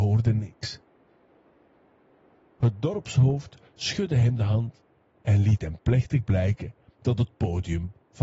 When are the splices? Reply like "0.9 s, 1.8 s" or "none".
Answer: none